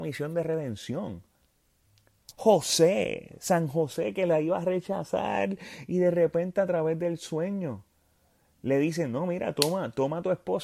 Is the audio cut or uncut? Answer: uncut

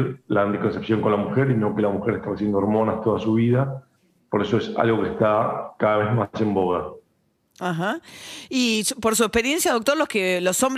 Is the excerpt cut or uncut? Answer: uncut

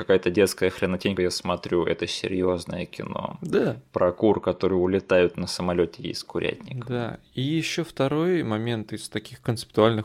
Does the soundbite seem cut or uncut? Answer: cut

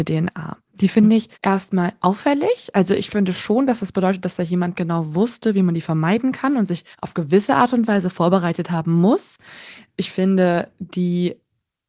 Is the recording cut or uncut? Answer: cut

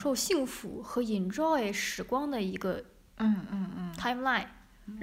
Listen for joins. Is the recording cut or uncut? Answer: uncut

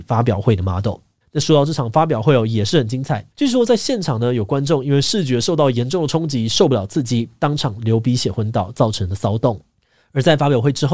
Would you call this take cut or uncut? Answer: cut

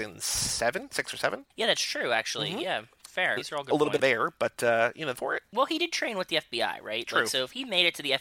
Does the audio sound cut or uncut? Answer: cut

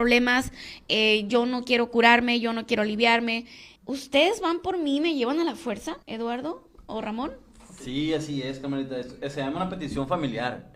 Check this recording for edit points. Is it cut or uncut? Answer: cut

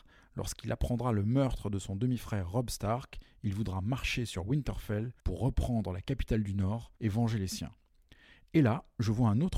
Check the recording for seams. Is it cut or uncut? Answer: cut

